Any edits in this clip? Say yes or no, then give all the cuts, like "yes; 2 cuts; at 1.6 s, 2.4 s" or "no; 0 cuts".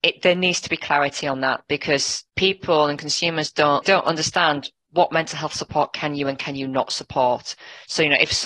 yes; 3 cuts; at 2.3 s, 3.8 s, 4.9 s